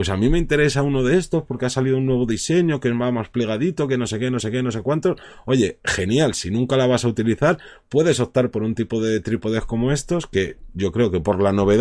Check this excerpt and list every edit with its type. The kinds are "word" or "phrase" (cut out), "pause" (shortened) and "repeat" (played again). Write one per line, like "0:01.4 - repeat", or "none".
0:04.4 - repeat